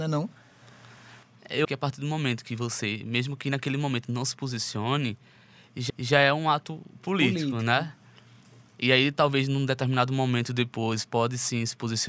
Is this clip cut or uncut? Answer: cut